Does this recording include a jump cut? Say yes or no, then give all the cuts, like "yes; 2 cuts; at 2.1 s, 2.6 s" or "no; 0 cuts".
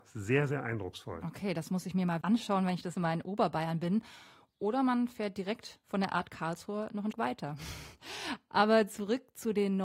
yes; 3 cuts; at 2.2 s, 2.9 s, 7.1 s